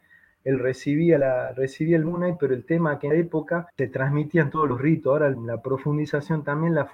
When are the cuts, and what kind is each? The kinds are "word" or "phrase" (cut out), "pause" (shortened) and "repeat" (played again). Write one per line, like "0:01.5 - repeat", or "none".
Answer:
0:03.1 - word
0:03.7 - pause